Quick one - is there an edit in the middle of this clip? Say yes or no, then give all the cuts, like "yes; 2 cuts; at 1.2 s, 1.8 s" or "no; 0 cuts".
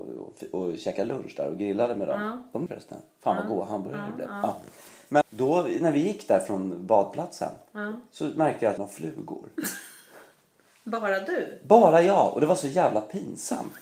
yes; 3 cuts; at 2.7 s, 5.2 s, 8.8 s